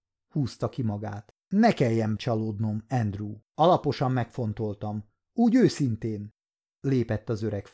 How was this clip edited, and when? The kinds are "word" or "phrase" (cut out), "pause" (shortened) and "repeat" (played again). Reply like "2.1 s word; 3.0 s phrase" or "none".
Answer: 1.4 s pause; 2.2 s word; 3.4 s pause